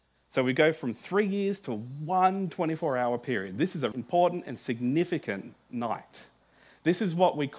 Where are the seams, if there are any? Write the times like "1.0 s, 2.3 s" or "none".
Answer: 3.9 s